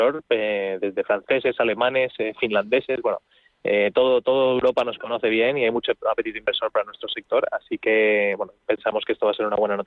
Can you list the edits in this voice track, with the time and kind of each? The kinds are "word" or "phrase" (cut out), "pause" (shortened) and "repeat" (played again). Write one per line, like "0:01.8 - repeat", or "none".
none